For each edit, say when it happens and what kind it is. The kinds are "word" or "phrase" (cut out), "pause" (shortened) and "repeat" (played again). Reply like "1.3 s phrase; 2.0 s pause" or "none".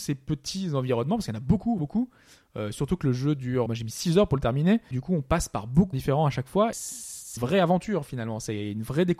1.8 s word; 3.7 s word; 4.9 s word; 5.9 s word; 6.7 s word; 7.4 s word